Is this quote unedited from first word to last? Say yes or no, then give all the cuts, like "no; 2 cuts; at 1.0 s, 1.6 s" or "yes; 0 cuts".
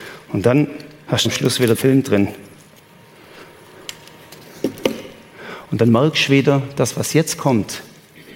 no; 2 cuts; at 1.2 s, 1.7 s